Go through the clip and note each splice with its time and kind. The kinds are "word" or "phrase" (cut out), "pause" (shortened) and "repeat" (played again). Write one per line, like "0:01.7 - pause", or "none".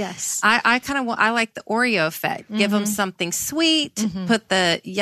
none